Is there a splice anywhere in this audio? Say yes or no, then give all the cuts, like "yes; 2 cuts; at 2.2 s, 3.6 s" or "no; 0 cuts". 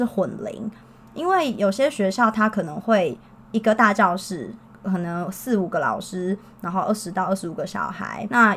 no; 0 cuts